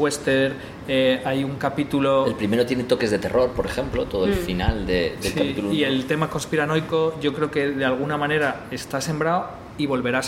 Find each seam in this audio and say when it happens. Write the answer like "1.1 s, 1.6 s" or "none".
5.2 s